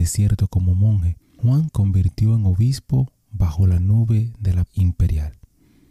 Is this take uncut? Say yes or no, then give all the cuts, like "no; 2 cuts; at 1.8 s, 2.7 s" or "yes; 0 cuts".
no; 2 cuts; at 1.7 s, 4.7 s